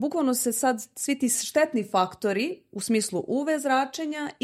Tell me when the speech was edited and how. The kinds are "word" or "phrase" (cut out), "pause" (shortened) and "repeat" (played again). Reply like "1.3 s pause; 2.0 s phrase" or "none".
none